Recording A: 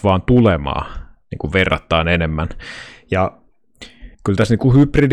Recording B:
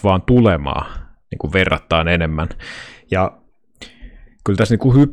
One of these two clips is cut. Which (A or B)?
A